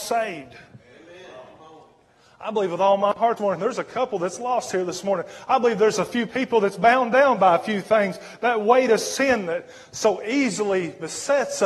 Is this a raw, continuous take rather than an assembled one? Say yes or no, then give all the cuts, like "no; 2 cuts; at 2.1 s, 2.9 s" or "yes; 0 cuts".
no; 1 cut; at 3.4 s